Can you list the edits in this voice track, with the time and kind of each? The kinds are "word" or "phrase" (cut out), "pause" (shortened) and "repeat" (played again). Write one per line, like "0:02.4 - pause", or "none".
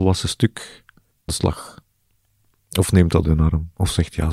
0:01.3 - word
0:03.2 - word